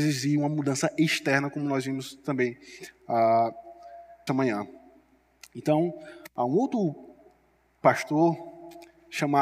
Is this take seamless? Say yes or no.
no